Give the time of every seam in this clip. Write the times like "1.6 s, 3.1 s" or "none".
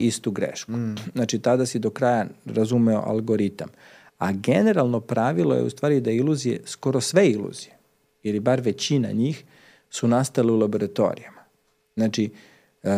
none